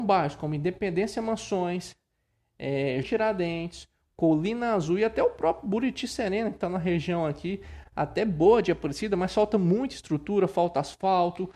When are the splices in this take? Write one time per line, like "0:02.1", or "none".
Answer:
0:03.0